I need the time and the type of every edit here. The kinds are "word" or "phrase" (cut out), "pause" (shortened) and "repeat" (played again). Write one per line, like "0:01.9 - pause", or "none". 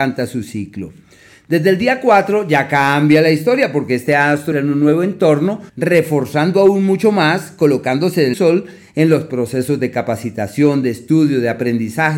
0:04.5 - word
0:05.7 - pause
0:08.3 - phrase